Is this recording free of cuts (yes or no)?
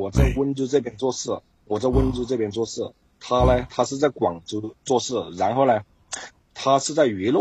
yes